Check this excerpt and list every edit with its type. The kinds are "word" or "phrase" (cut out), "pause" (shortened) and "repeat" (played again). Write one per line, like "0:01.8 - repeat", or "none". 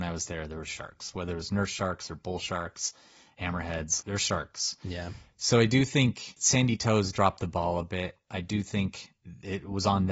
none